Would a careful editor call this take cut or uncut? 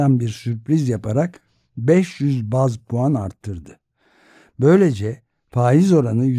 uncut